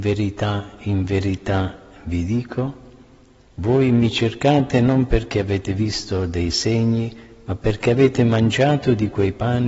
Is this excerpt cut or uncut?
uncut